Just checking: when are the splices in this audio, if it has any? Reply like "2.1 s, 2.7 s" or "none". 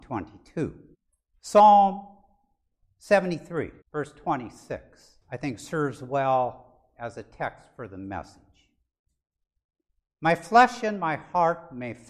0.9 s, 3.8 s, 5.2 s